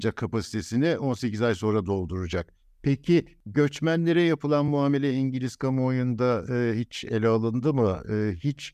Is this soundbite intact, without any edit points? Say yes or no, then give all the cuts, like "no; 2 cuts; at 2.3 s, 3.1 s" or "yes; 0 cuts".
yes; 0 cuts